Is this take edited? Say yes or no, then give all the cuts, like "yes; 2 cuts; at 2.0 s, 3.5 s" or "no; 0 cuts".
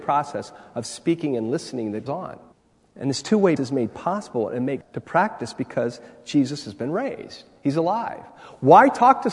yes; 4 cuts; at 2.1 s, 2.5 s, 3.6 s, 4.8 s